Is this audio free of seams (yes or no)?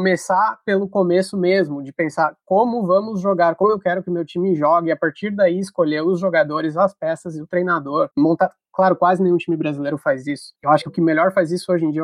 no